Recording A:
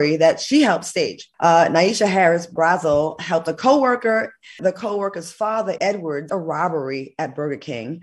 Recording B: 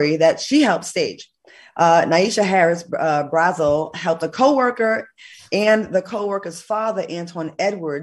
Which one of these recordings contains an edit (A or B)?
A